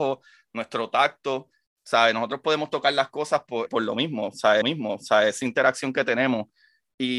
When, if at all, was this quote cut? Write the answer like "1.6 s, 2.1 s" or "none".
3.7 s, 4.6 s